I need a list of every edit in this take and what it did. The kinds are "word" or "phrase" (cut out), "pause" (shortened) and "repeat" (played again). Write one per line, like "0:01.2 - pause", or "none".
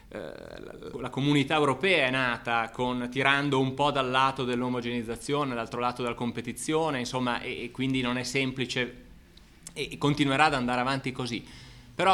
0:00.9 - word